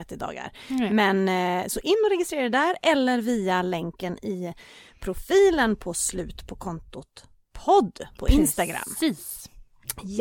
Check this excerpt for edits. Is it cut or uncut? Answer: uncut